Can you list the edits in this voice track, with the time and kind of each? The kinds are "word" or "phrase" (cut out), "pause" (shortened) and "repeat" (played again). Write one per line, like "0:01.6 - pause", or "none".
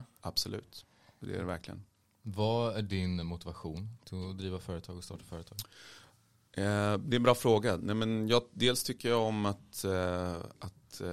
none